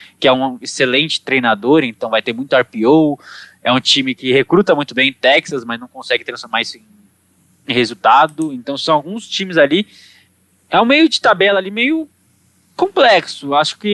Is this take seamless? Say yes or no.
yes